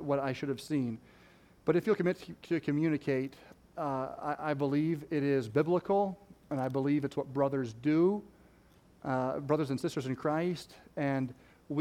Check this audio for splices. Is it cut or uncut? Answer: uncut